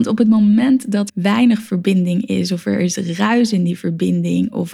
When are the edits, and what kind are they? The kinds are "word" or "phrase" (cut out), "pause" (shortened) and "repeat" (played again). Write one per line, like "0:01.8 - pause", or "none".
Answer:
0:01.1 - word